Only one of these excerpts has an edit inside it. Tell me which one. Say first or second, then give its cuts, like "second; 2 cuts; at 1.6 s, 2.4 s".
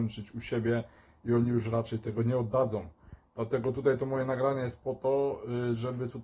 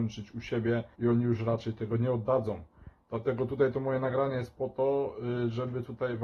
second; 1 cut; at 0.9 s